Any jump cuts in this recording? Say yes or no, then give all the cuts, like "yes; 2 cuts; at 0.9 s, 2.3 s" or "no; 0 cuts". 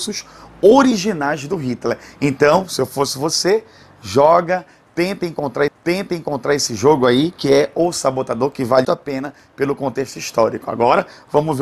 yes; 2 cuts; at 5.7 s, 8.8 s